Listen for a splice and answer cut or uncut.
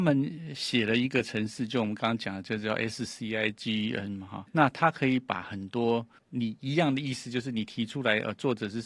cut